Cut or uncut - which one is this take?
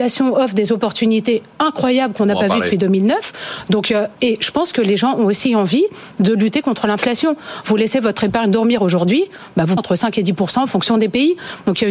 cut